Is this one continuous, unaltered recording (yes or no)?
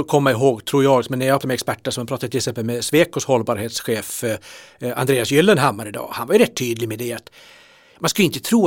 no